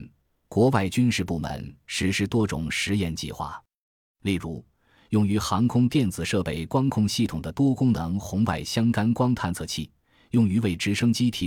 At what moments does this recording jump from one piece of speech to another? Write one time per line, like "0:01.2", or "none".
none